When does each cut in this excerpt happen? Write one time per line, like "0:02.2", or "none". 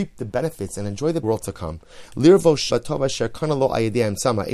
0:01.2
0:02.7